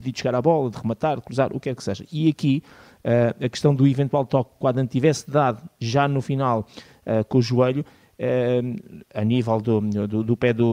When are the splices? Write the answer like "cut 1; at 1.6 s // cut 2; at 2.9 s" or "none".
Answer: none